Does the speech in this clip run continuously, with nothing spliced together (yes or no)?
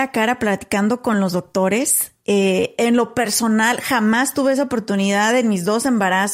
yes